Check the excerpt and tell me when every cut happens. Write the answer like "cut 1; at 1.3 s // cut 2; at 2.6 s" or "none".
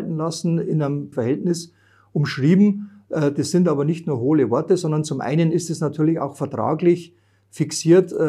cut 1; at 1.1 s